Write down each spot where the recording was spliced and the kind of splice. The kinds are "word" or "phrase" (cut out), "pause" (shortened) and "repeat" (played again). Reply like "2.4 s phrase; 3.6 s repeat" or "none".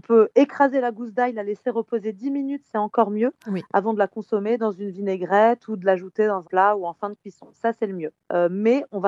6.4 s word